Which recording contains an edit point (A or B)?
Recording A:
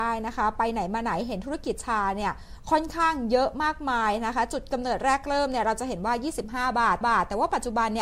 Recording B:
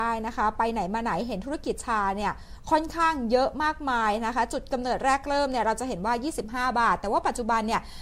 A